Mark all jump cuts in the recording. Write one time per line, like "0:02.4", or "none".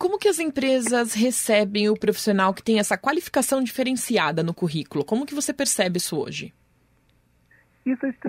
none